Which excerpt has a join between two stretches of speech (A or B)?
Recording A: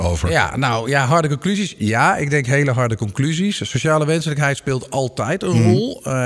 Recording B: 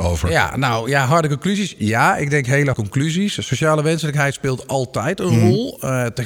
B